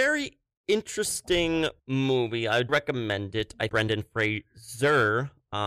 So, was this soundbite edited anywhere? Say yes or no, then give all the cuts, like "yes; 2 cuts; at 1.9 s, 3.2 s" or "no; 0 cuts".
yes; 3 cuts; at 1.8 s, 2.7 s, 3.7 s